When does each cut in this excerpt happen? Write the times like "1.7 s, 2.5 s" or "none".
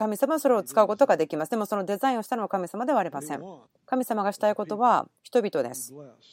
3.7 s, 5.2 s